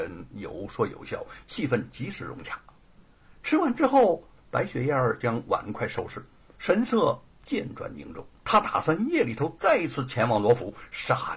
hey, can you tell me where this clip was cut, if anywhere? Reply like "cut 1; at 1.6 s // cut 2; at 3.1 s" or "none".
cut 1; at 6.5 s // cut 2; at 7.3 s // cut 3; at 8.4 s